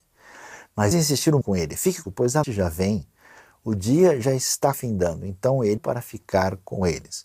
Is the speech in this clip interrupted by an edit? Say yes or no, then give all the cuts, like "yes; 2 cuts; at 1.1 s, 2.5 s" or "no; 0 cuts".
yes; 6 cuts; at 0.9 s, 1.4 s, 2.0 s, 2.4 s, 4.7 s, 5.8 s